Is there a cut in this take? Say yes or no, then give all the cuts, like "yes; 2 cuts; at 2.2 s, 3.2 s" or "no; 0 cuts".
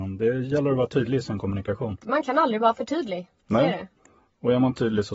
no; 0 cuts